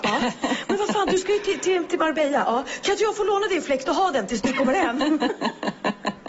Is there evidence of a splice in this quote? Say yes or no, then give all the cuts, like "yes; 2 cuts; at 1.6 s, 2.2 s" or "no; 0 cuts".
no; 0 cuts